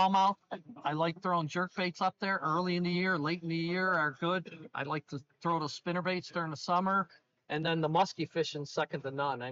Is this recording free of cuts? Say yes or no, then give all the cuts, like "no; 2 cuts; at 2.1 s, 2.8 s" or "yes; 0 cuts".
yes; 0 cuts